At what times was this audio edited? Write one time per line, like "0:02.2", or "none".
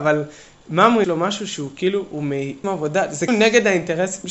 0:01.0
0:02.6
0:03.3